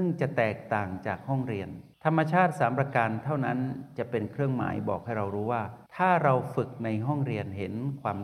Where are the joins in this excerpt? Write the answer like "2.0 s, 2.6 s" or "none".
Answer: 1.9 s, 5.9 s